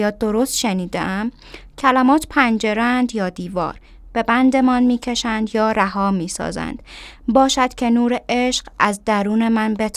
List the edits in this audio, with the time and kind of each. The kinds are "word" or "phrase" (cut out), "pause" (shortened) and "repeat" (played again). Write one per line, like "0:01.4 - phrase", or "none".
none